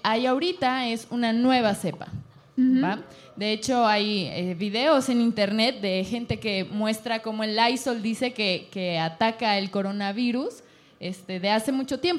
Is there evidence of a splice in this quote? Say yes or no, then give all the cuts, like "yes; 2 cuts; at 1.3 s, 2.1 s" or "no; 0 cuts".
no; 0 cuts